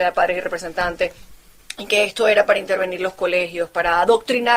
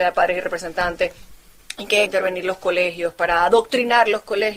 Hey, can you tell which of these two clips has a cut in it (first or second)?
second